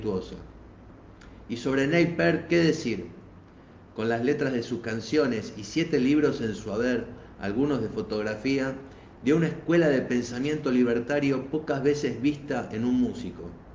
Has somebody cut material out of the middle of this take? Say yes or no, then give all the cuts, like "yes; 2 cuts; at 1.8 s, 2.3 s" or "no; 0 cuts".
no; 0 cuts